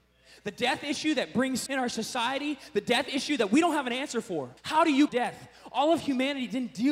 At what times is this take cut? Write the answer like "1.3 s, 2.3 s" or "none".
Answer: 1.7 s, 4.6 s, 5.1 s